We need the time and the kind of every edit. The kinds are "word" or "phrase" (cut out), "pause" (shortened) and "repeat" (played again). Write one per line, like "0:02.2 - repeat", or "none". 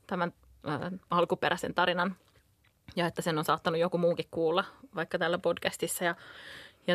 0:01.0 - pause